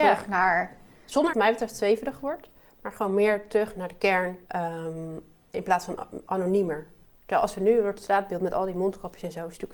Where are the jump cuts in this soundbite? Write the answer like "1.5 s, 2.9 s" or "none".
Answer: 1.3 s, 4.5 s